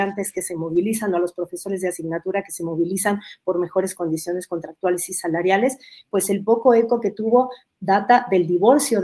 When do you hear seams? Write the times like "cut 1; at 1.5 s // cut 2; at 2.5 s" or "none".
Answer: none